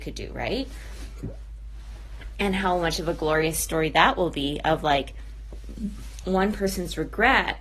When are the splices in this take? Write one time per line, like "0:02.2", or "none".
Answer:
none